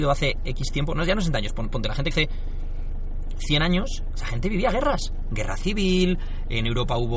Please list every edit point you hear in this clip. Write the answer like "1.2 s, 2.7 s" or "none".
2.1 s